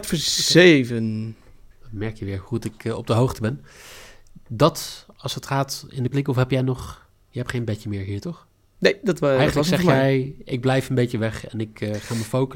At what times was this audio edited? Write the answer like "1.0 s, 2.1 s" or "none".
1.7 s, 6.1 s, 8.6 s